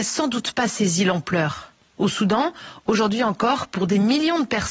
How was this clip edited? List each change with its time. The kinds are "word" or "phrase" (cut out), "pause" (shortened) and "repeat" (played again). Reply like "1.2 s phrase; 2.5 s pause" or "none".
none